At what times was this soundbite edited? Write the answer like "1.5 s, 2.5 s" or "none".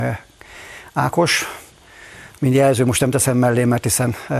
2.4 s